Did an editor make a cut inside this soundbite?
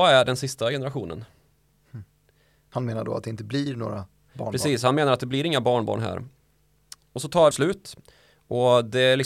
yes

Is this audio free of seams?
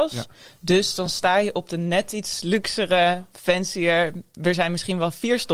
yes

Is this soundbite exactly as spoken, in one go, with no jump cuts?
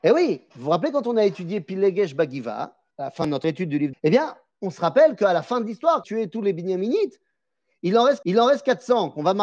no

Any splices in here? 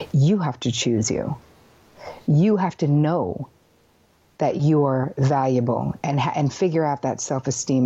no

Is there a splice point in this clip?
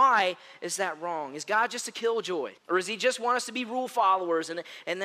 yes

